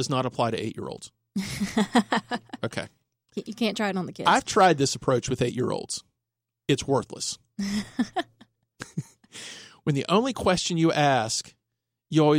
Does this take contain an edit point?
no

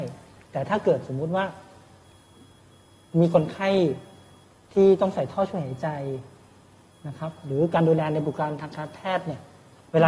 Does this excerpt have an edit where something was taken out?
no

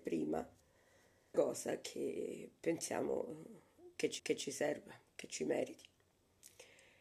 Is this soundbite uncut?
no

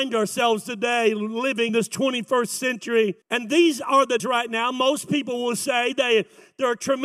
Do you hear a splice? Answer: yes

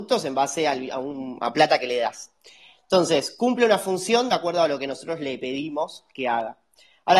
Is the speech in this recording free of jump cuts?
yes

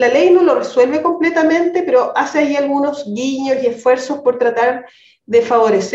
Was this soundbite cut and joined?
no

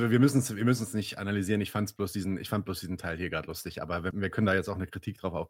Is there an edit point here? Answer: yes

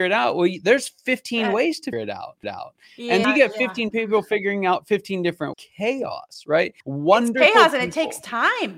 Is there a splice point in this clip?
yes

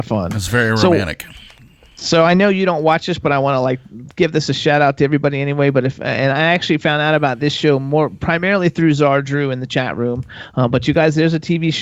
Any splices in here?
no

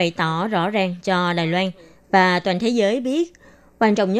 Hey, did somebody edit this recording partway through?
no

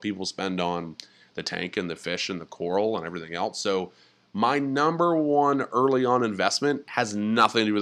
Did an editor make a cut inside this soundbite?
no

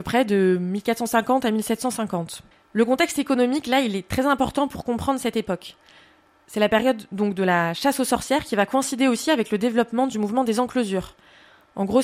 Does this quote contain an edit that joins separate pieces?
yes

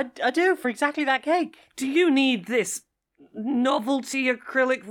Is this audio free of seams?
yes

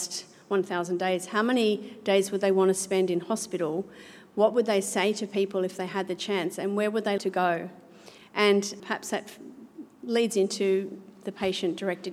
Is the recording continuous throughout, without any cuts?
no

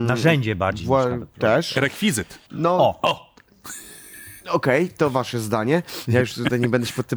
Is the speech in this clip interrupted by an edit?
yes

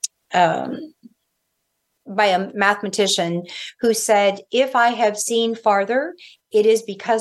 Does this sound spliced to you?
no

